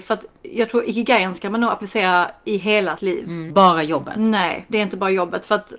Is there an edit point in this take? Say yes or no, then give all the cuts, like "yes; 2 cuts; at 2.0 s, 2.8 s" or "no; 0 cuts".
yes; 3 cuts; at 3.0 s, 3.5 s, 4.7 s